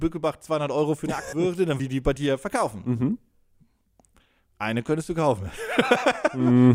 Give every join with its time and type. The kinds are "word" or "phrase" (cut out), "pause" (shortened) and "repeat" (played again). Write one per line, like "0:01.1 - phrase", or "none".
0:01.3 - word
0:01.8 - word